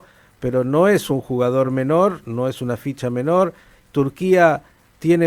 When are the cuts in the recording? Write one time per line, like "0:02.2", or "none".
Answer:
none